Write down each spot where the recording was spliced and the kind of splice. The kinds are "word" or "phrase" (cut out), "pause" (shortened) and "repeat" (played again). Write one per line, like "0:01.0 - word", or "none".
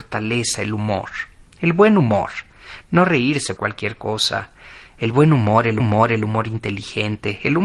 0:03.6 - word
0:05.8 - repeat